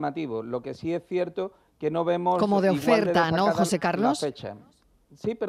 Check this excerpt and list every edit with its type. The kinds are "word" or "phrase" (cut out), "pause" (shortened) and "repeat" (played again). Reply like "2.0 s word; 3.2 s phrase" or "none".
none